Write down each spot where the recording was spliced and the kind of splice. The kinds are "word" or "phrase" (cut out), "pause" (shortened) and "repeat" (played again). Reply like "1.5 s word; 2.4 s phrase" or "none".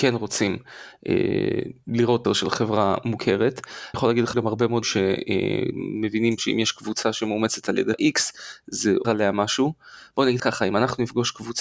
2.2 s word; 3.9 s word; 4.3 s word; 4.8 s word; 6.4 s word; 7.9 s word; 9.0 s word; 10.4 s word